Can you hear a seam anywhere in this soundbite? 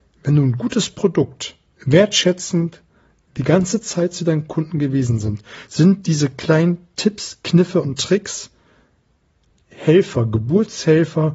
no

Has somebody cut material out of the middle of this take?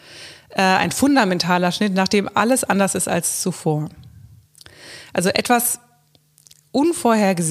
no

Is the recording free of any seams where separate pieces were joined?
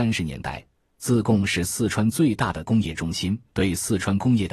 no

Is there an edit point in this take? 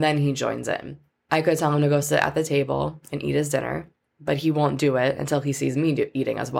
no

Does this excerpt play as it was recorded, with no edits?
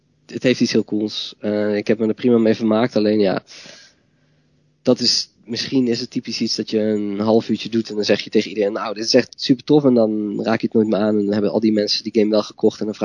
yes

